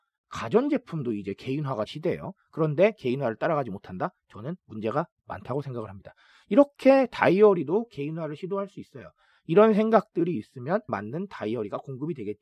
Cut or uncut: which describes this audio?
cut